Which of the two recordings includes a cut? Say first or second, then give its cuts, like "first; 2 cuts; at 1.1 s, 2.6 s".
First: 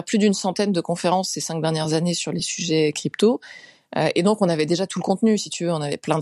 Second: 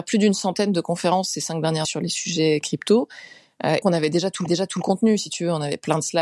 second; 3 cuts; at 1.8 s, 3.8 s, 4.5 s